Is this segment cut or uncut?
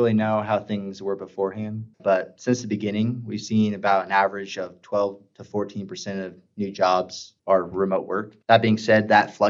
cut